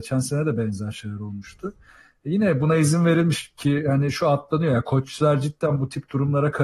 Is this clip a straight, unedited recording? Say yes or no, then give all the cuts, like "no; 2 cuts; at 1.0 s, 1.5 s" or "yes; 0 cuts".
yes; 0 cuts